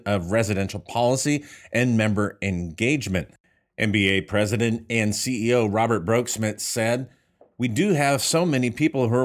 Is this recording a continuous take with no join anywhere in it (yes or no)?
yes